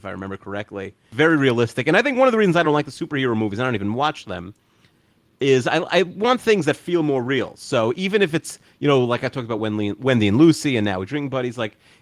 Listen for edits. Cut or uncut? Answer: uncut